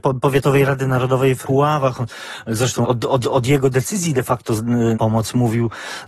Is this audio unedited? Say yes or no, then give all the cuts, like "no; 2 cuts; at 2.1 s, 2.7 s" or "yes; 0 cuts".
no; 4 cuts; at 1.4 s, 2.8 s, 3.2 s, 4.9 s